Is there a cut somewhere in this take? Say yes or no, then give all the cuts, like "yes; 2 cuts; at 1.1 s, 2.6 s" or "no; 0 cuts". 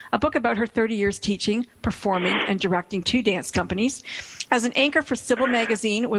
no; 0 cuts